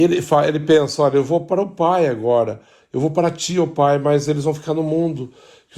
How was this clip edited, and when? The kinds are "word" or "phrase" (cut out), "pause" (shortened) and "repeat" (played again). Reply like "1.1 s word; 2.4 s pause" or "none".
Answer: none